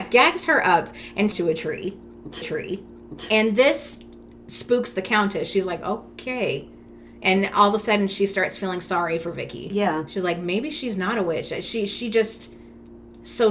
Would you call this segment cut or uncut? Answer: cut